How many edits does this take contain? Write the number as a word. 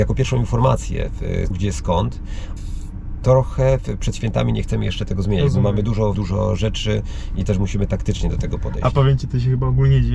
three